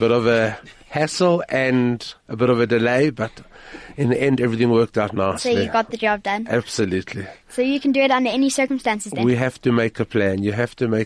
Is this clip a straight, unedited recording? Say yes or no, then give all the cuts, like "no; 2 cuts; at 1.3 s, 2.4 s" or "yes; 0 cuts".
yes; 0 cuts